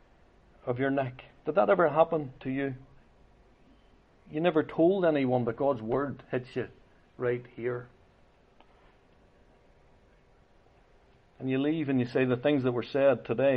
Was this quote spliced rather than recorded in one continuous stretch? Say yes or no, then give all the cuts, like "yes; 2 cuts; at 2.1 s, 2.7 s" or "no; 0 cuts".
no; 0 cuts